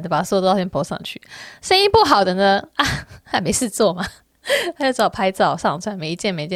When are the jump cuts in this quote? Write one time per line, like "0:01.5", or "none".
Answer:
0:04.2